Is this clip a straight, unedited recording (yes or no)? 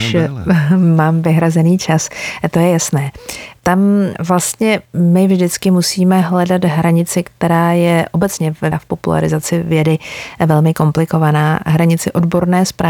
no